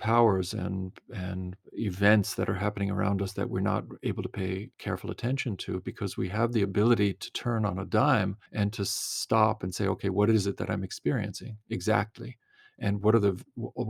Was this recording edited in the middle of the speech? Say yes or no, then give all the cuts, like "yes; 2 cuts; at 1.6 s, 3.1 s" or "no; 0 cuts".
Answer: yes; 2 cuts; at 4.7 s, 8.5 s